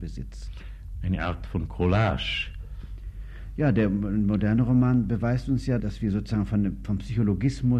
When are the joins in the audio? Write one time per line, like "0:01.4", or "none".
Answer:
0:05.8